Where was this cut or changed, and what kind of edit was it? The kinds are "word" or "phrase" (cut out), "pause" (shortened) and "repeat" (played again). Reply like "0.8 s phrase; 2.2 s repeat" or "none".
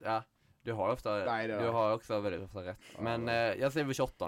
none